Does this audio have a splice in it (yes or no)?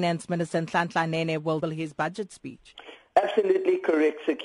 yes